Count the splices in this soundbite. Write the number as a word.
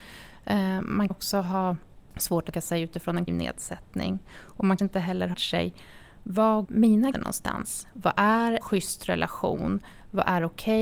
eight